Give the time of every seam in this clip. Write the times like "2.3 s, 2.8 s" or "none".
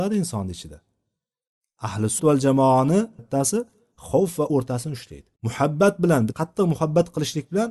2.2 s, 3.2 s, 4.5 s, 5.4 s, 6.3 s